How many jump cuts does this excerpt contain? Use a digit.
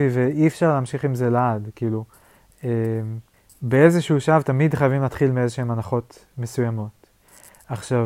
1